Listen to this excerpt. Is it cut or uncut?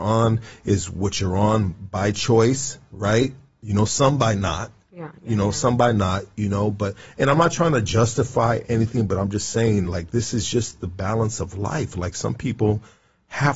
uncut